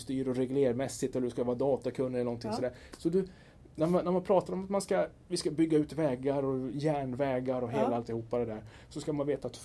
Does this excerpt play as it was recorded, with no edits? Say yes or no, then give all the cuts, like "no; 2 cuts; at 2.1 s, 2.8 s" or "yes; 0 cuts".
yes; 0 cuts